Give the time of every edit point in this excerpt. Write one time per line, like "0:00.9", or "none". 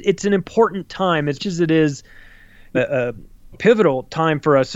0:01.4
0:02.7
0:03.5